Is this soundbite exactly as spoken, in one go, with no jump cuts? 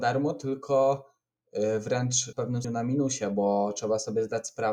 no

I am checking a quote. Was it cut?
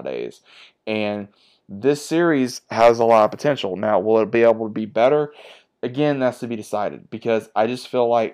no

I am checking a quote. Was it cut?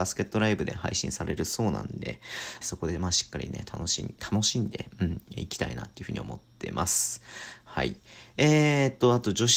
yes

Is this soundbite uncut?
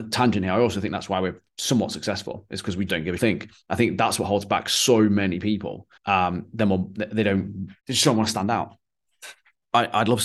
no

